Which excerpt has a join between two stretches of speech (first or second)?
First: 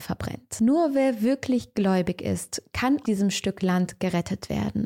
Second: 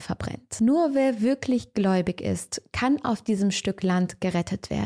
first